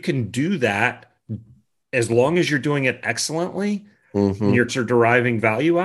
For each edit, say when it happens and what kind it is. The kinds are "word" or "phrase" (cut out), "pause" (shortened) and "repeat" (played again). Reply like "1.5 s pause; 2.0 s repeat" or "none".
4.7 s word